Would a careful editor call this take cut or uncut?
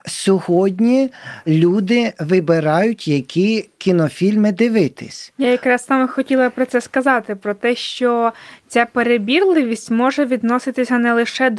uncut